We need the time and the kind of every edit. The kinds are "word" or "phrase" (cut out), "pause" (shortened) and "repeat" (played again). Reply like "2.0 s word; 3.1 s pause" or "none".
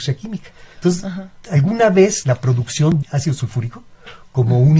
2.2 s phrase; 3.0 s word